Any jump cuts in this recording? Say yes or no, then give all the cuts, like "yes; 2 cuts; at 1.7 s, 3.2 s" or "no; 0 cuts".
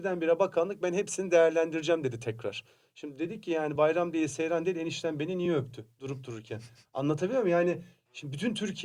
no; 0 cuts